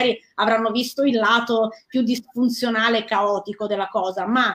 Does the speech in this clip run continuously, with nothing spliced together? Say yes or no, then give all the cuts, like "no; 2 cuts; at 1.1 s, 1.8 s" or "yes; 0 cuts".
yes; 0 cuts